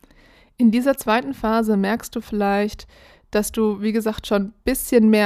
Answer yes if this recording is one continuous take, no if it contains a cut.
yes